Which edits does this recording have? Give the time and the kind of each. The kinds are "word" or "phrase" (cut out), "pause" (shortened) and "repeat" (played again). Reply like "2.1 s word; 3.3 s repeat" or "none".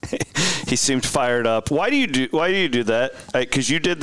none